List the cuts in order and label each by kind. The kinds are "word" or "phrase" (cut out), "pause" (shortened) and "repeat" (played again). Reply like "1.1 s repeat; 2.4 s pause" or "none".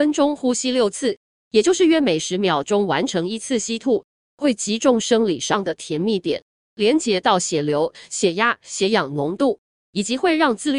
none